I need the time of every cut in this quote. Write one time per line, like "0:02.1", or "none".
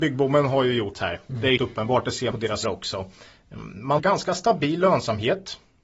0:00.9
0:01.6
0:02.3
0:02.6
0:04.0